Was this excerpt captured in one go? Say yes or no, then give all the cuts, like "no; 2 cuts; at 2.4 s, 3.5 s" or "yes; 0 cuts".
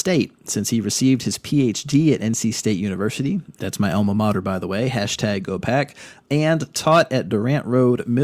yes; 0 cuts